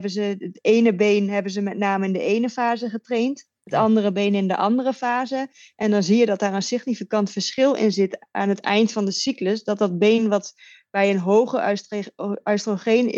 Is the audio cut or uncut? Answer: uncut